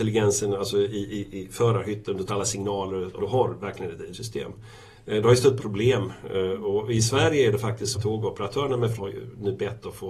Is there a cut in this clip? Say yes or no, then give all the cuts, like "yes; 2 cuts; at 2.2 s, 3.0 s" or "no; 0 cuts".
yes; 6 cuts; at 2.3 s, 3.2 s, 4.1 s, 5.6 s, 7.9 s, 9.0 s